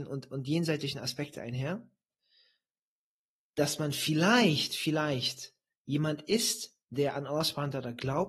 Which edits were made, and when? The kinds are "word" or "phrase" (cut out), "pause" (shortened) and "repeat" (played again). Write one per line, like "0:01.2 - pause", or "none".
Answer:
none

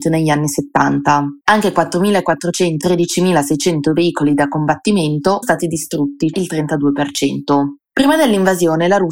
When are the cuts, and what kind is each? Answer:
0:01.4 - pause
0:02.8 - word
0:05.4 - phrase
0:06.3 - word

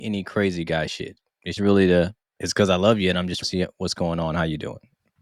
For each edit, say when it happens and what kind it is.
0:01.6 - word
0:02.2 - pause
0:03.4 - word

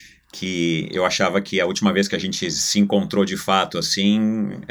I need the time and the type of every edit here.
none

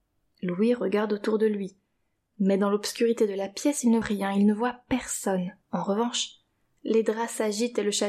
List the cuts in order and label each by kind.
0:04.0 - word
0:05.6 - pause

